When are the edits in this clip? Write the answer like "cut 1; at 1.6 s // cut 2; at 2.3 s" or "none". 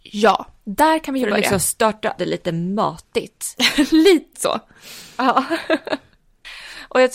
cut 1; at 2.2 s // cut 2; at 4.3 s